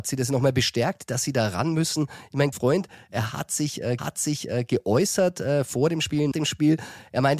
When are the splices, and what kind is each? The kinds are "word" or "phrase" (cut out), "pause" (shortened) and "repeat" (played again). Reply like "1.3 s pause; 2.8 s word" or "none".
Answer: 2.5 s word; 4.0 s repeat; 6.3 s word